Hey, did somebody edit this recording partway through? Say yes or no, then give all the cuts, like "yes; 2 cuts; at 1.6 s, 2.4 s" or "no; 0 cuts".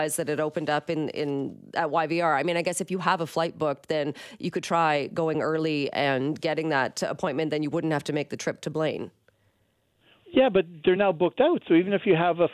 no; 0 cuts